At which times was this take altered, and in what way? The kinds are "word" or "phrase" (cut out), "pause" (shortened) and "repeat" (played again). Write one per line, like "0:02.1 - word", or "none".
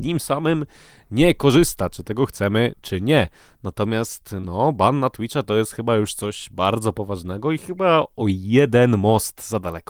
none